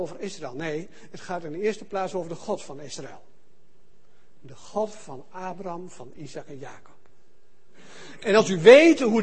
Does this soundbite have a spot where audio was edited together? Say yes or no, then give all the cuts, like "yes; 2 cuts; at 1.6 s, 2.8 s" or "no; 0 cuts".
no; 0 cuts